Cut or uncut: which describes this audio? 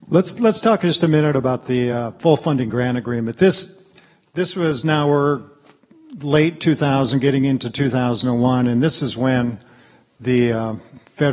uncut